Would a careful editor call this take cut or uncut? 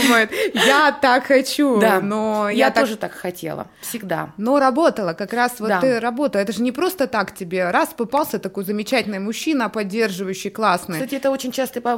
uncut